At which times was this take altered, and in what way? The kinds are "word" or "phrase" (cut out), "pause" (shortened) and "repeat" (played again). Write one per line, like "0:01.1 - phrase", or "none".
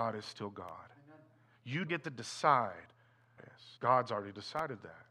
0:01.9 - word
0:03.4 - phrase
0:03.8 - pause